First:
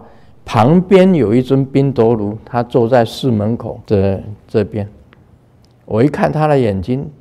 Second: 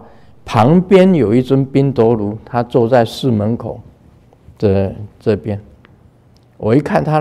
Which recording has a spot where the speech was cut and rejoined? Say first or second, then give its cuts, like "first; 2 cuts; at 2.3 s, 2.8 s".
first; 1 cut; at 3.8 s